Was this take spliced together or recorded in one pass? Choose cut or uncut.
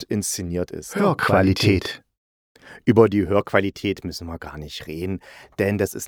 uncut